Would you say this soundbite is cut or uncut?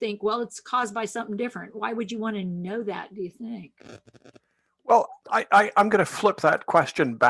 uncut